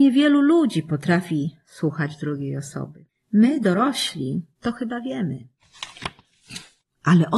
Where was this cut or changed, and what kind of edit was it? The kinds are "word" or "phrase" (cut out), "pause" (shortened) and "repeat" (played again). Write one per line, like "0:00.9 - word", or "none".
0:04.5 - pause

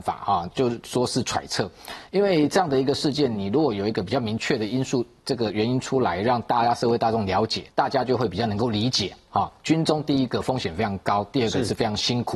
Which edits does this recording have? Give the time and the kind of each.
0:07.7 - pause

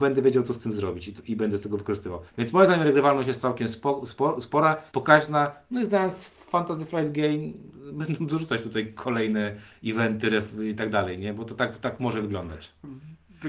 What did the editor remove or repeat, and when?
0:02.3 - pause
0:04.9 - pause

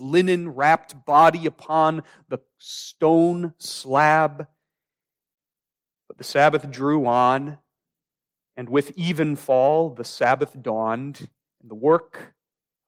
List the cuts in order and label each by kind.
none

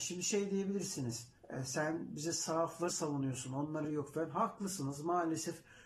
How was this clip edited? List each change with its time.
0:01.4 - pause
0:02.9 - word
0:03.8 - word

